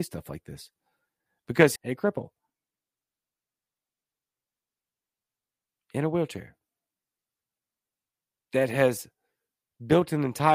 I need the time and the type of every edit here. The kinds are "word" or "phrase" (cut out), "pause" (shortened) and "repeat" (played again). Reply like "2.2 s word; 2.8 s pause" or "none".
1.8 s phrase